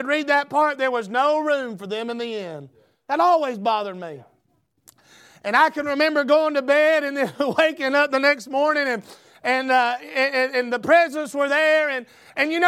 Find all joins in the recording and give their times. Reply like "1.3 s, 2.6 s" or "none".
none